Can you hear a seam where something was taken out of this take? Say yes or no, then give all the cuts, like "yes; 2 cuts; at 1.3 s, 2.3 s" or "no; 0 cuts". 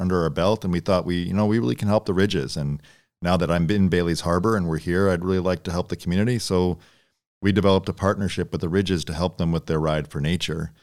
no; 0 cuts